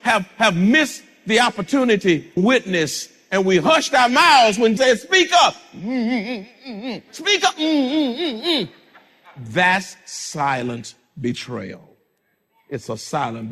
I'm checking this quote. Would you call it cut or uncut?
cut